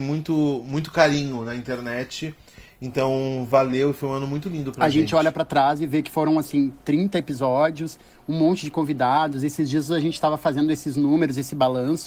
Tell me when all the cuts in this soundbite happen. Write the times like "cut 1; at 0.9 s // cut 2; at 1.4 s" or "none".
none